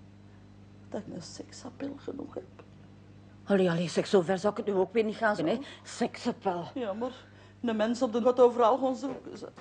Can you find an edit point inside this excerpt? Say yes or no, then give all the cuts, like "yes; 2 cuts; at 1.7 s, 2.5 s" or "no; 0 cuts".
yes; 3 cuts; at 1.1 s, 5.4 s, 8.2 s